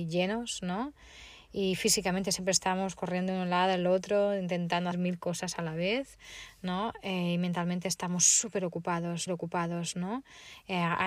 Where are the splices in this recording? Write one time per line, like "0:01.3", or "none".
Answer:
0:04.9
0:09.3